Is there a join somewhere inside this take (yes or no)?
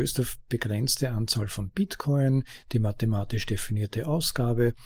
no